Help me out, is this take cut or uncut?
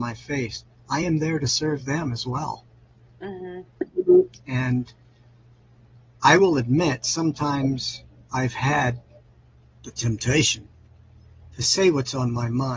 uncut